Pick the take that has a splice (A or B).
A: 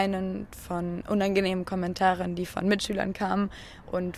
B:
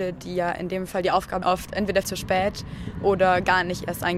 B